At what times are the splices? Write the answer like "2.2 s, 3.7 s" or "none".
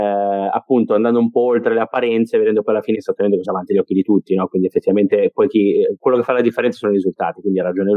2.9 s, 3.4 s